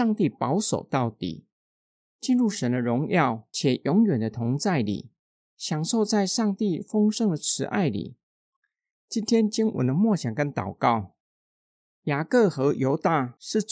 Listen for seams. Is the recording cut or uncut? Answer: uncut